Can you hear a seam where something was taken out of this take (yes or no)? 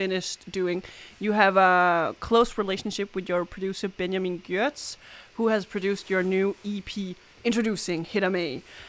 no